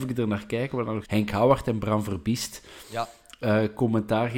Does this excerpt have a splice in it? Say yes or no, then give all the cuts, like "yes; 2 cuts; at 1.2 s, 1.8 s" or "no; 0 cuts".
yes; 1 cut; at 1.0 s